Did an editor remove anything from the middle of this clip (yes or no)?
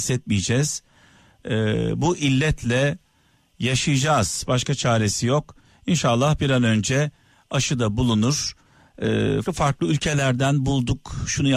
yes